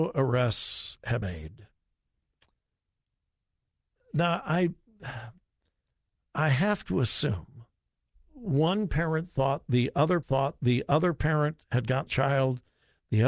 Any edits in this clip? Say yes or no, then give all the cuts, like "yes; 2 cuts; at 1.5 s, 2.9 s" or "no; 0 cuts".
yes; 4 cuts; at 1.2 s, 7.9 s, 10.2 s, 12.1 s